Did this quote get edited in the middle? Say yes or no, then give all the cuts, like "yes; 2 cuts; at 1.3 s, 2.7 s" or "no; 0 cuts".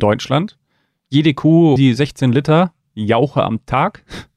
yes; 1 cut; at 1.8 s